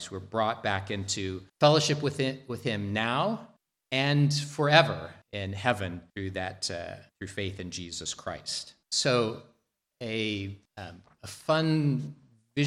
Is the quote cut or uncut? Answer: cut